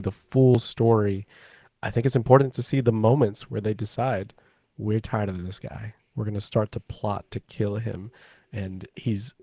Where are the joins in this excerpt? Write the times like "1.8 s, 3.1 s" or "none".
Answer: none